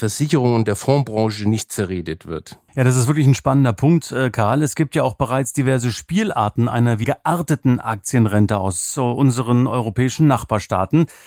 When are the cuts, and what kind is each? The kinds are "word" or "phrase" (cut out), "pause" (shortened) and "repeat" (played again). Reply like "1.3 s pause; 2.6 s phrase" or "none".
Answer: 2.7 s pause; 7.0 s phrase